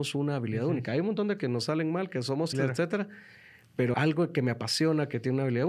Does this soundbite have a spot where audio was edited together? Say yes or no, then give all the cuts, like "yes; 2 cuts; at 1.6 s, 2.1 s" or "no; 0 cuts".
yes; 3 cuts; at 1.4 s, 2.5 s, 3.9 s